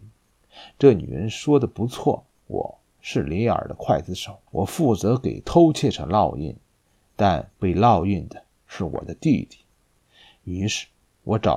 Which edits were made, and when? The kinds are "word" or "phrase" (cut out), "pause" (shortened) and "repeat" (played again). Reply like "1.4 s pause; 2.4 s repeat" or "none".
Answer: 2.4 s pause; 4.5 s pause

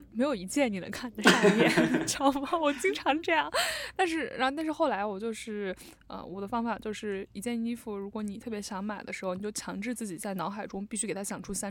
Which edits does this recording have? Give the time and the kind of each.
none

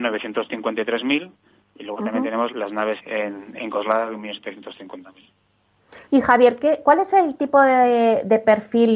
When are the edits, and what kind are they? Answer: 2.5 s word; 3.0 s word; 6.0 s pause

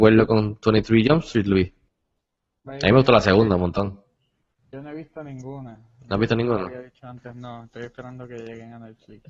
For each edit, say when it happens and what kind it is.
none

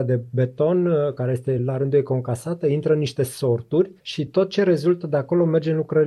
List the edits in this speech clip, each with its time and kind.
none

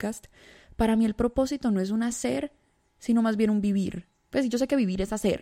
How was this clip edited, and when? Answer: none

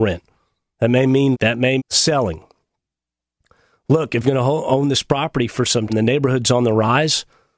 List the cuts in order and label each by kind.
1.3 s word; 1.8 s word; 4.2 s word; 5.9 s word

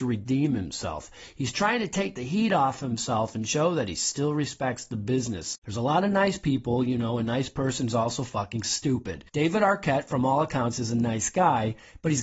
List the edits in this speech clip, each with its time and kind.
9.3 s pause

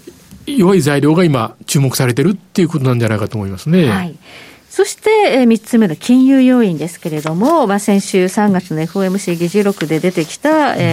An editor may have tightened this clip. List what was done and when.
none

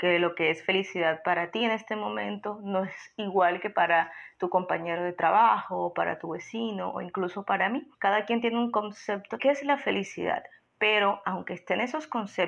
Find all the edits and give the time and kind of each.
7.9 s pause; 9.4 s phrase

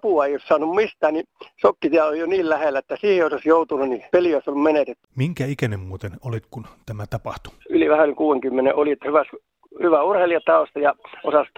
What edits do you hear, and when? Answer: 4.1 s pause; 5.1 s pause; 7.6 s pause

